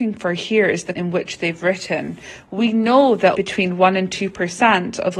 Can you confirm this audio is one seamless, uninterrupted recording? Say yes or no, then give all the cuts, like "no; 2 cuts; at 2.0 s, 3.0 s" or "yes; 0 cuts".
no; 2 cuts; at 0.9 s, 3.3 s